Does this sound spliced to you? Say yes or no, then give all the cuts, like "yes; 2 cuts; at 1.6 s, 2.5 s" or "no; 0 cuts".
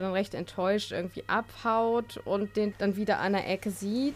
yes; 1 cut; at 2.7 s